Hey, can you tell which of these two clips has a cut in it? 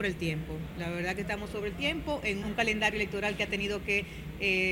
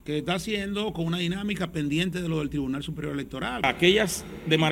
first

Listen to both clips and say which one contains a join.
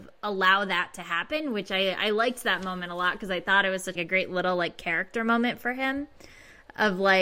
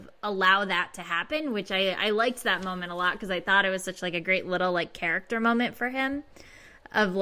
first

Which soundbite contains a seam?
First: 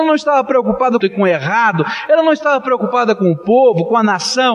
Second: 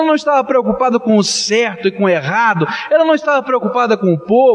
first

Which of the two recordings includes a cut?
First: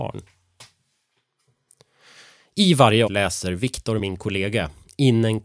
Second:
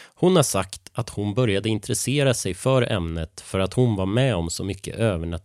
first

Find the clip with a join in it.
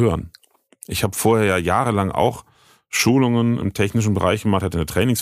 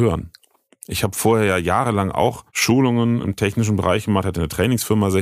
second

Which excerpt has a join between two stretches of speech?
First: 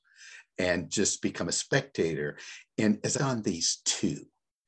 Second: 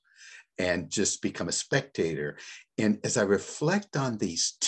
first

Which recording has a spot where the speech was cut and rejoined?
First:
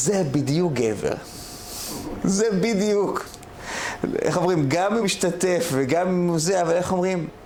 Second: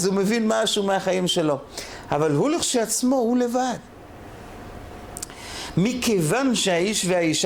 first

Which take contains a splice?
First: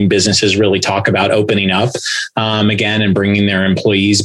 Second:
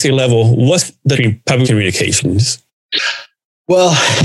second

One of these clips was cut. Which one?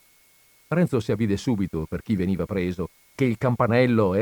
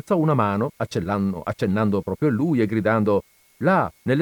first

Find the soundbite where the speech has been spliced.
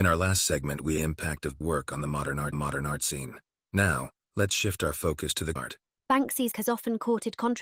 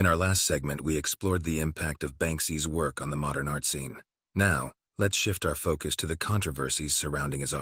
first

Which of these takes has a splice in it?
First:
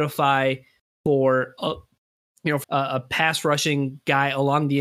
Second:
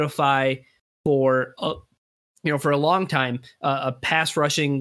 first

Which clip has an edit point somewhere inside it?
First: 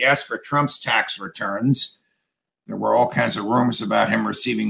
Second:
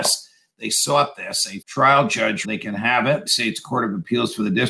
second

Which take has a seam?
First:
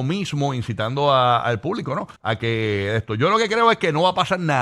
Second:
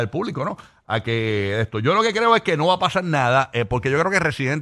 first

